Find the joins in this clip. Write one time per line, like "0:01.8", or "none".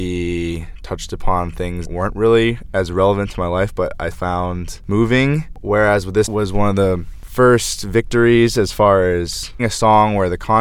0:01.8
0:04.1
0:06.3
0:09.6